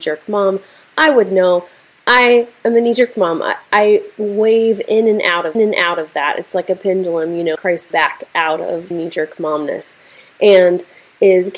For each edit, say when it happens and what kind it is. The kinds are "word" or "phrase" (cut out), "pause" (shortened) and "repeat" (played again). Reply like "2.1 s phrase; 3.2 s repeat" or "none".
5.5 s repeat; 7.5 s word; 7.9 s phrase; 8.9 s word